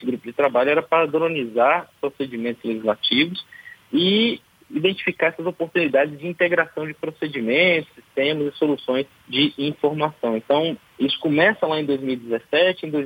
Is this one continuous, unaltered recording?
yes; 0 cuts

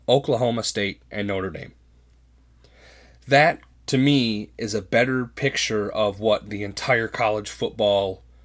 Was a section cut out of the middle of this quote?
yes; 1 cut; at 3.7 s

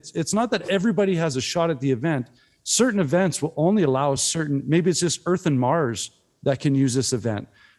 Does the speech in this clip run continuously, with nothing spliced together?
yes; 0 cuts

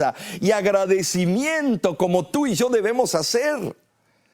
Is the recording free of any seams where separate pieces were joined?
yes; 0 cuts

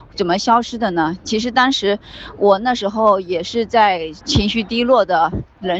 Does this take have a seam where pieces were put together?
yes; 1 cut; at 4.2 s

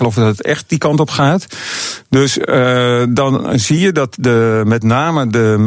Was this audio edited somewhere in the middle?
no; 0 cuts

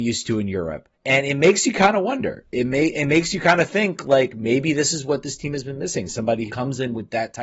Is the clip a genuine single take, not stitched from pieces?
no; 2 cuts; at 0.9 s, 6.5 s

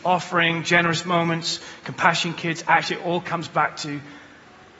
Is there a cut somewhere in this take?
no; 0 cuts

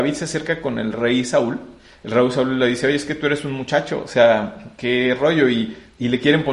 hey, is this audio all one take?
yes; 0 cuts

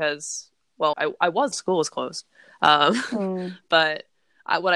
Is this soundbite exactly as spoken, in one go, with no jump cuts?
no; 2 cuts; at 0.9 s, 1.5 s

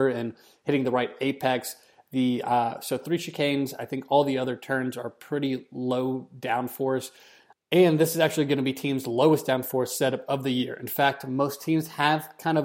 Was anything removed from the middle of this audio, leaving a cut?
no; 0 cuts

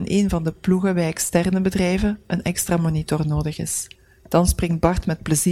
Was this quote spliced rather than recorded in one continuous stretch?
no; 0 cuts

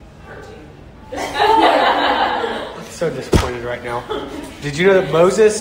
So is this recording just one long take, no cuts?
yes; 0 cuts

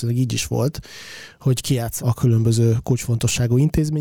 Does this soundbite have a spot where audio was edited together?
yes; 1 cut; at 2.0 s

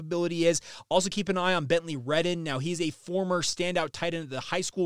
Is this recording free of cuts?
yes; 0 cuts

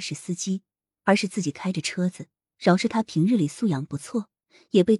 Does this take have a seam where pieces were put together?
no; 0 cuts

